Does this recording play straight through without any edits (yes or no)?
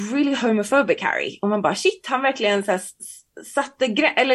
yes